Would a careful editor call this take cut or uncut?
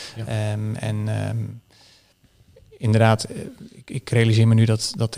uncut